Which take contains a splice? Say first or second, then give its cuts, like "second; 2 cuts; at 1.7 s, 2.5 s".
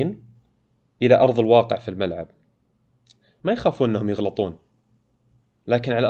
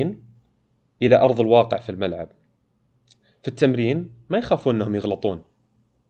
first; 1 cut; at 3.4 s